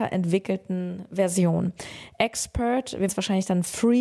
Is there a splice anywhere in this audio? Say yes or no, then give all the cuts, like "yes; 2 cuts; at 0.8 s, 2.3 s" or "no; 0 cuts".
yes; 1 cut; at 3.1 s